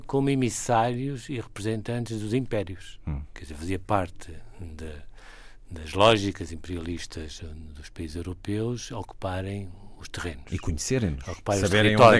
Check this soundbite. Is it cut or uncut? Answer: uncut